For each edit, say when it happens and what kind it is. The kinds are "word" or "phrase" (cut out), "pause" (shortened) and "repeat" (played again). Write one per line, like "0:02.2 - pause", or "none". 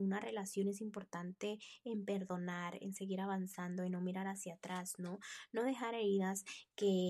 none

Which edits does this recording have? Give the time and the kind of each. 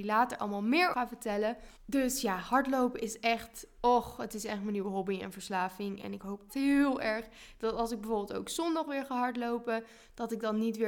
0:00.9 - word
0:01.8 - pause
0:06.5 - phrase

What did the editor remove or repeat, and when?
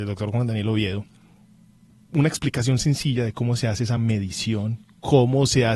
none

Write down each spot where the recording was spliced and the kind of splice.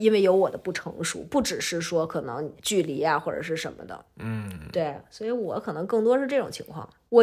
0:02.6 - pause

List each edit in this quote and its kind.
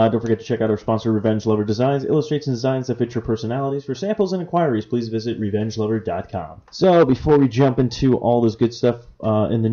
0:06.7 - pause

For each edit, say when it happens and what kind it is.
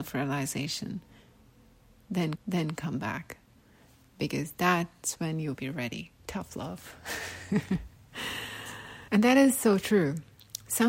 0:02.3 - repeat
0:05.5 - word
0:06.2 - pause
0:09.1 - pause

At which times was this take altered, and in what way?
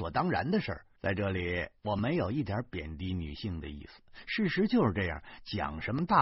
0:01.0 - pause
0:01.8 - pause

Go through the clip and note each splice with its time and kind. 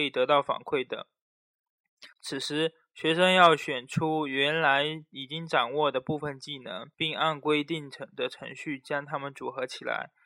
0:02.1 - pause
0:06.9 - pause

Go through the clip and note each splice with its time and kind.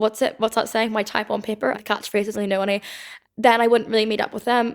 0:01.7 - phrase
0:02.3 - phrase
0:03.2 - word

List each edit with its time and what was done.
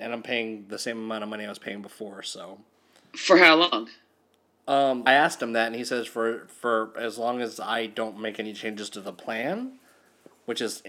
0:05.1 - word

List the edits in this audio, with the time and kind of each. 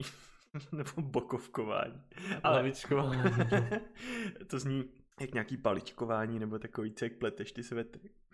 0:05.1 - pause
0:07.0 - word

